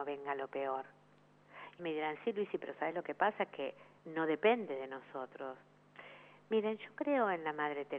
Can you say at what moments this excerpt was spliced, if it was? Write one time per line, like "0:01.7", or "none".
0:01.8
0:04.0